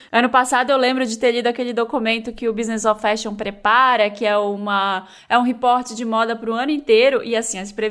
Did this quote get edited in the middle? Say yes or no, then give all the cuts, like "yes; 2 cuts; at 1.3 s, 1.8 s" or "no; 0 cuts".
no; 0 cuts